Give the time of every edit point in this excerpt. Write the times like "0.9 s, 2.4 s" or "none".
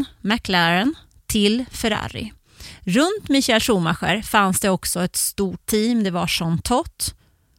5.6 s